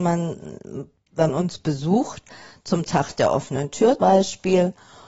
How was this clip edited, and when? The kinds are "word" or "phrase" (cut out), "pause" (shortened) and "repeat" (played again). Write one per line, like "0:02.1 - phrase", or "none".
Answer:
0:01.3 - word
0:04.0 - word

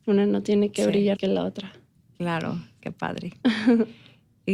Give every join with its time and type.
0:01.1 - word
0:02.8 - word

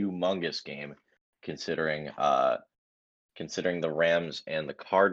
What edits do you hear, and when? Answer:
none

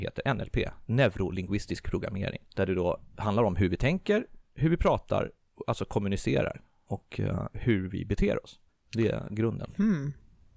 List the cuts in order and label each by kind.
0:02.5 - pause

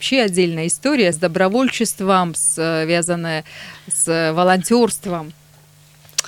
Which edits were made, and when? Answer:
0:01.1 - word

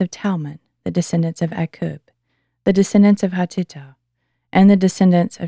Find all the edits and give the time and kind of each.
none

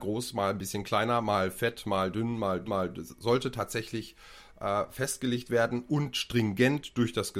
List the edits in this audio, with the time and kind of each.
0:02.7 - repeat

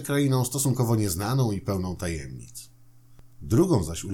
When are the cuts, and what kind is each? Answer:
none

